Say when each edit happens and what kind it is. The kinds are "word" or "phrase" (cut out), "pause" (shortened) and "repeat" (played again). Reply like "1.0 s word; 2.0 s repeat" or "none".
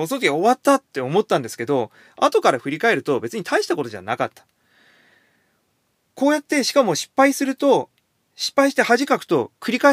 none